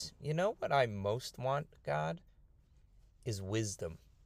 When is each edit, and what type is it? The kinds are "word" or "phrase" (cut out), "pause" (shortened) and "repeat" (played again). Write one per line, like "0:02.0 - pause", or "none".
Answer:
none